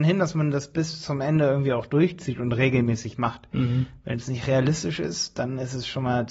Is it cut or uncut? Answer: uncut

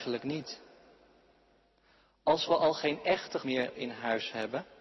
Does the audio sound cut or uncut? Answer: cut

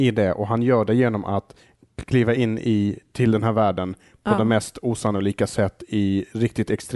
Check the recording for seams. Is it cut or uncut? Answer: uncut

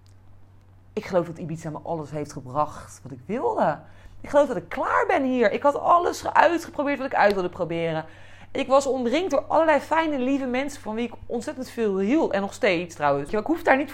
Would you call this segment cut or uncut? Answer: uncut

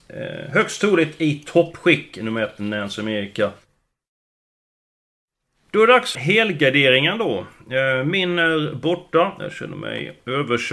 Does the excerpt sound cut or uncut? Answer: cut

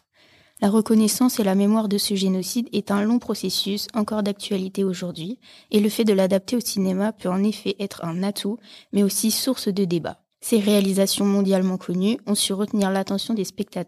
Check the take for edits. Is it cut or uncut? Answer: cut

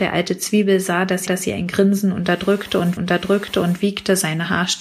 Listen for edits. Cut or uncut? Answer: cut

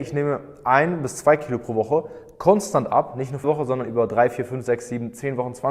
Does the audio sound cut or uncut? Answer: cut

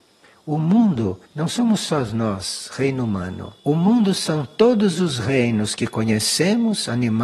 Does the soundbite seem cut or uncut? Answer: cut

